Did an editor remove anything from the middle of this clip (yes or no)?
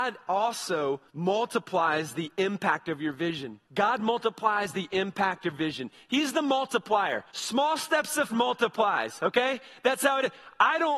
yes